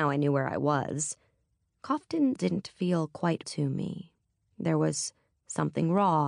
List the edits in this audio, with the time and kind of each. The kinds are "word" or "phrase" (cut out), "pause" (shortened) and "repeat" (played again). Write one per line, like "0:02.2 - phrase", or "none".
0:02.4 - word
0:03.4 - word

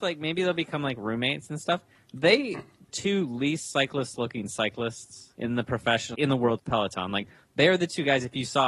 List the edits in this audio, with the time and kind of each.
0:02.9 - phrase
0:05.3 - pause
0:06.1 - word
0:06.6 - word

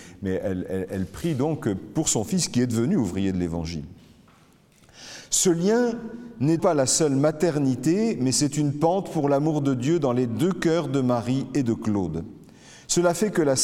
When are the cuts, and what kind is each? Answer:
0:06.6 - word

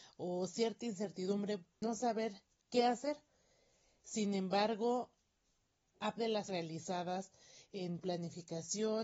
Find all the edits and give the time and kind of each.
0:01.8 - word
0:06.2 - word
0:06.5 - word
0:08.0 - word

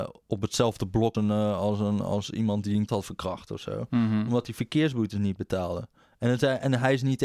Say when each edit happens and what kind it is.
0:01.1 - word
0:02.9 - word
0:06.0 - pause

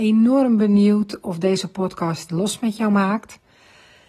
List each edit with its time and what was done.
0:02.3 - word

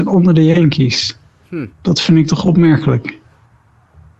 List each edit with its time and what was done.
0:01.7 - pause

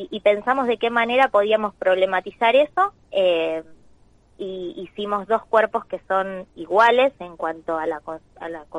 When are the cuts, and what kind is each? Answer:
0:03.0 - pause

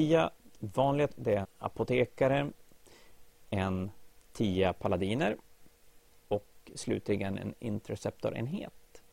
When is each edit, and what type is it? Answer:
0:01.1 - word
0:01.4 - word
0:04.2 - pause
0:06.2 - phrase

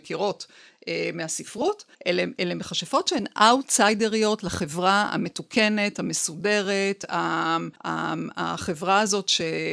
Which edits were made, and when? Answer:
0:01.9 - pause
0:07.8 - pause

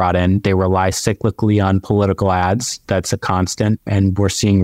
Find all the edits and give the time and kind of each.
none

